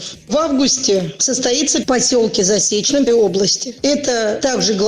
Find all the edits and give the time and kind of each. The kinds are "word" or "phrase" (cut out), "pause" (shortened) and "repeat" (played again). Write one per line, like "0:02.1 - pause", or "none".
0:01.8 - phrase
0:03.1 - word